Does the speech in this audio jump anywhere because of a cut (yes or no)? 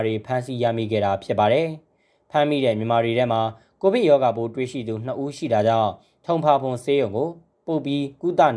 no